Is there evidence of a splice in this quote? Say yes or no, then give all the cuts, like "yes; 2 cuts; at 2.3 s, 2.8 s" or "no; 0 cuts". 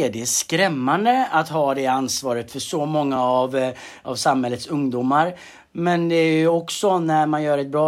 no; 0 cuts